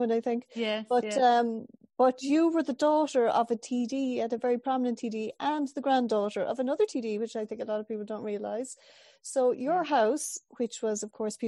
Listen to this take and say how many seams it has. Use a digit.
0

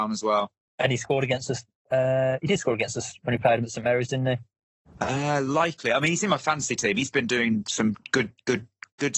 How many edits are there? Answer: 0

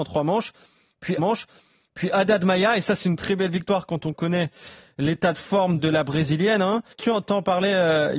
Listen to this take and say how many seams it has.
3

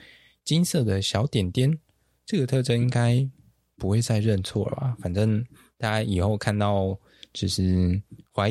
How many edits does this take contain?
0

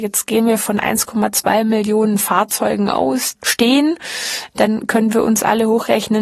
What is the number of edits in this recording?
1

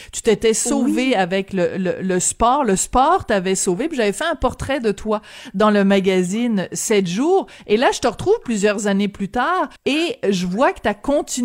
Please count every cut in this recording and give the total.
1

